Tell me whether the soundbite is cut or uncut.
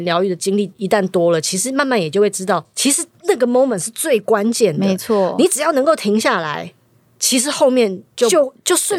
uncut